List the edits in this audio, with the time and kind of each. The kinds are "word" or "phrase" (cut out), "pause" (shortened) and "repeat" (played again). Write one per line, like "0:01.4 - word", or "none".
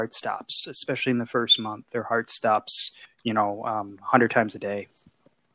0:03.0 - pause

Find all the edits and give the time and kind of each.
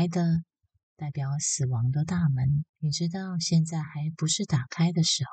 0:02.7 - pause

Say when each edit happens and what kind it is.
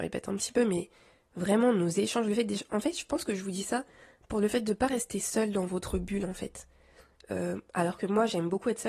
none

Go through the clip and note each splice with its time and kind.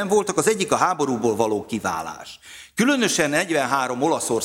none

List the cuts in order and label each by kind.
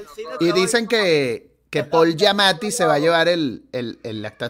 none

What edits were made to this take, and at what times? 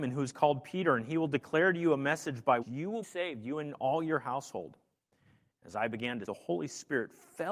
0:02.6 - word
0:03.0 - word
0:06.3 - word

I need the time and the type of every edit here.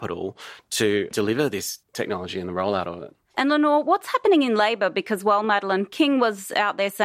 0:01.8 - pause

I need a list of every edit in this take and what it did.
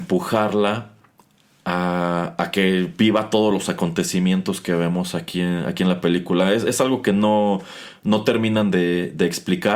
none

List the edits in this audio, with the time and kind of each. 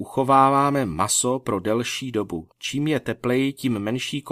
0:02.5 - pause

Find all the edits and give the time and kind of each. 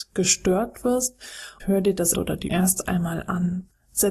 0:01.6 - word
0:02.1 - word
0:02.5 - word

